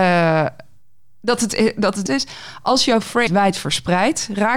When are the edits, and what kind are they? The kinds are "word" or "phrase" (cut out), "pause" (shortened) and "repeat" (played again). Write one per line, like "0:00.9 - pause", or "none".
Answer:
0:02.1 - phrase
0:03.3 - word